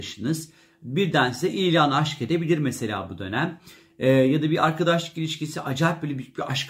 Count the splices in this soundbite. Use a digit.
0